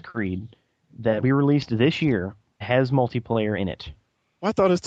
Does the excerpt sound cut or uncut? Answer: cut